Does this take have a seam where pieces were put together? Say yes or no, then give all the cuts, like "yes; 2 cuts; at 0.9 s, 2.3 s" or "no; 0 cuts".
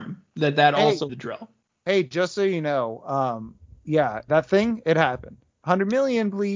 yes; 2 cuts; at 1.1 s, 4.3 s